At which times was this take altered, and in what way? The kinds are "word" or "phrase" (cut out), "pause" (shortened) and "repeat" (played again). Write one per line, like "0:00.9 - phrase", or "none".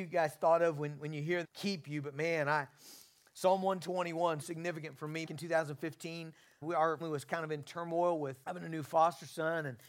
0:01.4 - word
0:04.4 - word
0:05.3 - word
0:06.6 - word
0:07.0 - word
0:08.4 - word